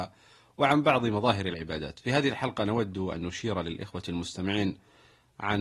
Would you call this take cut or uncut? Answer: uncut